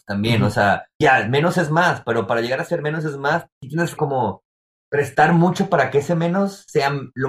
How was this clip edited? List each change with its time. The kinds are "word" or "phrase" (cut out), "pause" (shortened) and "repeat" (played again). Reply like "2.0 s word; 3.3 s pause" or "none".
1.0 s word; 4.0 s word